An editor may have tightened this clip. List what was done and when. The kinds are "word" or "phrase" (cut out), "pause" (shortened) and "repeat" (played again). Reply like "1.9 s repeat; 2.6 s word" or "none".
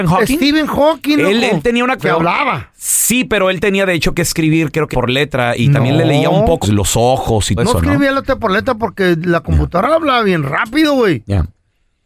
2.0 s word; 4.9 s word; 6.6 s word; 7.6 s word